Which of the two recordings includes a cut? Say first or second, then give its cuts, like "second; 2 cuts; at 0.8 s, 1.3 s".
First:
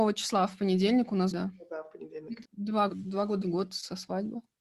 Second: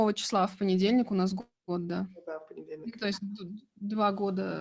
first; 4 cuts; at 1.3 s, 2.4 s, 2.9 s, 3.4 s